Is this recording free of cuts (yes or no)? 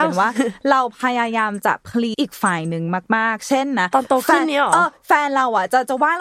no